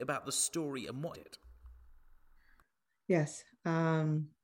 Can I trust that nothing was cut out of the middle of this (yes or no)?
no